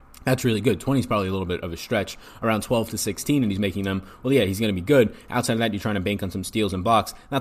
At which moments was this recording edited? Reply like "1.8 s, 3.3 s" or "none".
none